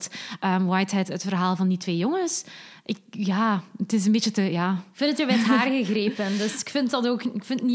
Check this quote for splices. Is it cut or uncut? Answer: cut